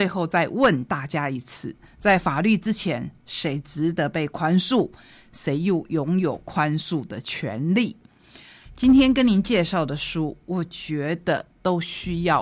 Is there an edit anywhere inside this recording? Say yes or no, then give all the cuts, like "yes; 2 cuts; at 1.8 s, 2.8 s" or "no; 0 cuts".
no; 0 cuts